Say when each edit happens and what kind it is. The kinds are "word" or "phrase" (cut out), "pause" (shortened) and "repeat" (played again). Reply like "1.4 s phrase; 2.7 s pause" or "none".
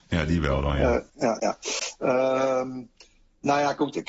1.1 s pause